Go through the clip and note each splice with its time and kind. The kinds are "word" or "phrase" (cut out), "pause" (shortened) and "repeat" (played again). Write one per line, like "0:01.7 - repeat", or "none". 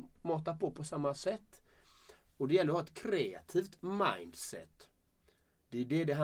none